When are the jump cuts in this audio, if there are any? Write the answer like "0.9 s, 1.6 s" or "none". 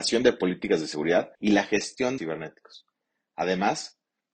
1.3 s, 2.2 s